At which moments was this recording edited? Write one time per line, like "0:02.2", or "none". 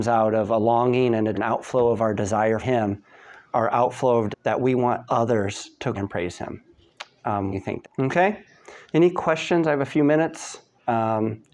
0:01.3
0:02.6
0:03.5
0:04.3
0:05.9
0:07.5
0:07.8